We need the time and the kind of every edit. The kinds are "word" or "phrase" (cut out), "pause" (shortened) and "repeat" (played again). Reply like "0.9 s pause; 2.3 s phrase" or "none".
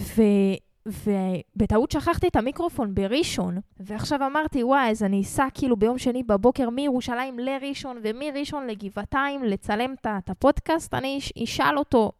3.7 s pause